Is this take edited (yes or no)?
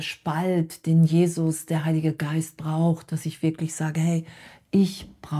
no